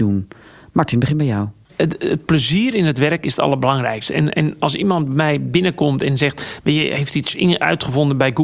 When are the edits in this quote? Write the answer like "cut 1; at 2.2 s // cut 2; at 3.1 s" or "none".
none